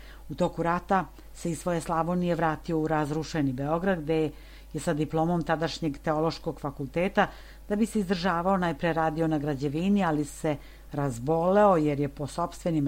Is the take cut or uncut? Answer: uncut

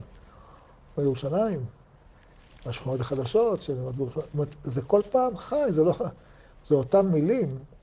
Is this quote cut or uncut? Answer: uncut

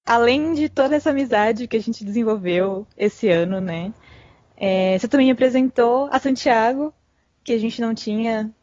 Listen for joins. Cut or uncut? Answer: uncut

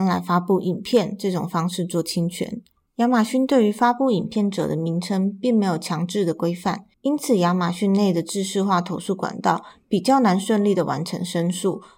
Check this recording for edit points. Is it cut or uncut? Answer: uncut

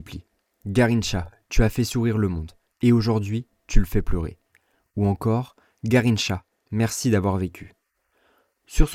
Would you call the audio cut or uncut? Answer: uncut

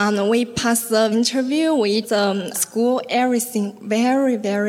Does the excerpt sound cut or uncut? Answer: cut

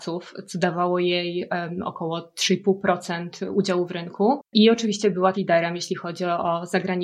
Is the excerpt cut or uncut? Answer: cut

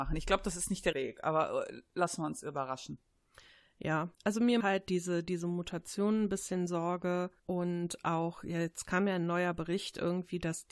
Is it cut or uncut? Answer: cut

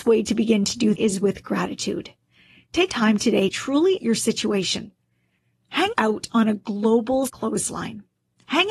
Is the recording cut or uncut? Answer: cut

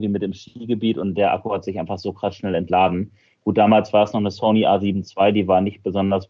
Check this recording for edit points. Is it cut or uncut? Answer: uncut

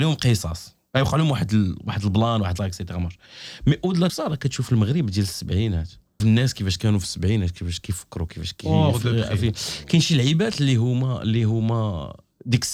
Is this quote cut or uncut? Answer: cut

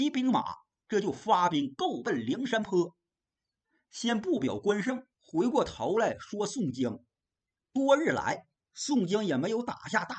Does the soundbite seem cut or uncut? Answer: cut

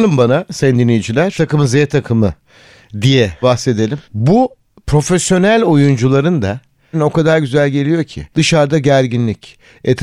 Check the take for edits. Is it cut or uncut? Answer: cut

